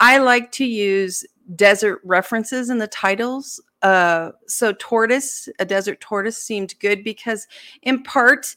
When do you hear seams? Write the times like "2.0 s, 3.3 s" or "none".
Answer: none